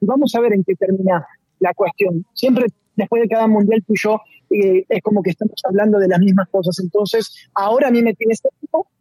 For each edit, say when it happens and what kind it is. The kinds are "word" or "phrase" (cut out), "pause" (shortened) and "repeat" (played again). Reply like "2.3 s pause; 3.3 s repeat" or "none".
none